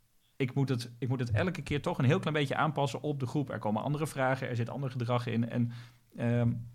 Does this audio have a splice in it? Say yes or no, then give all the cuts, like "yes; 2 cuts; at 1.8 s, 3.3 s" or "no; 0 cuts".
no; 0 cuts